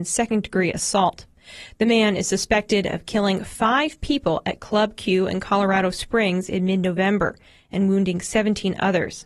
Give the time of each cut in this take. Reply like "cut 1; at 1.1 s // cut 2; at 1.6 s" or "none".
none